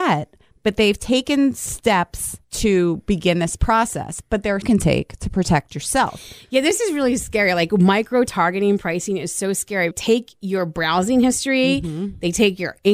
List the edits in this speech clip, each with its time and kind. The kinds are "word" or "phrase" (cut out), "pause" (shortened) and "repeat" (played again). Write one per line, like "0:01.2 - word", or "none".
0:02.4 - pause
0:04.6 - phrase
0:09.9 - phrase